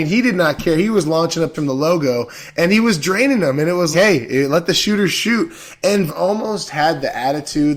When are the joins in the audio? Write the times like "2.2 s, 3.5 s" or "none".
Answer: 1.5 s, 3.9 s, 6.1 s